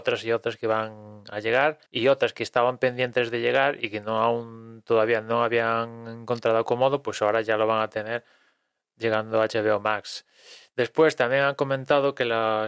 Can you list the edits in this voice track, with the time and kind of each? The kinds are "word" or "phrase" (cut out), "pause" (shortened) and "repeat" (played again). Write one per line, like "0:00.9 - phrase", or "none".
0:01.9 - pause